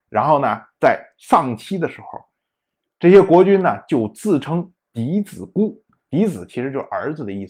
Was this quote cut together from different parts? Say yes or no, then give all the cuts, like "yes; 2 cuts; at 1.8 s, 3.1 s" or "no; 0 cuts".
no; 0 cuts